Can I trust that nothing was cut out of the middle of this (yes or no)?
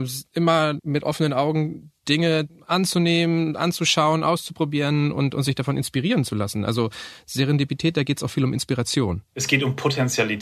no